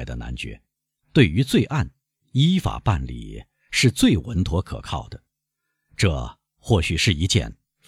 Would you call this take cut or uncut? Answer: uncut